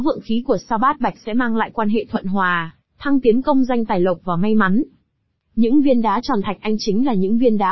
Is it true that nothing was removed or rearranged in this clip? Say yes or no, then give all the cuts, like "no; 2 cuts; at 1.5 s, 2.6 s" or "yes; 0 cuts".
yes; 0 cuts